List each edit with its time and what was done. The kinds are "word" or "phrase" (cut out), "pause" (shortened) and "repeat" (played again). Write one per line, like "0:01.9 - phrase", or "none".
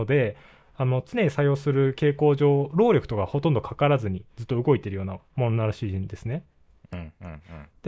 0:04.3 - pause